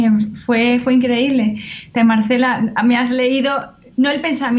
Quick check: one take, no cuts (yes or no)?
no